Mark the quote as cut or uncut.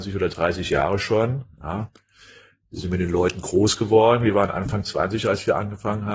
uncut